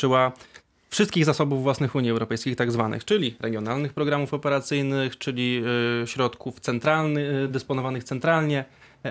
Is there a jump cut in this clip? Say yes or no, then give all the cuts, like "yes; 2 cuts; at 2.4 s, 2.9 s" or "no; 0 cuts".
no; 0 cuts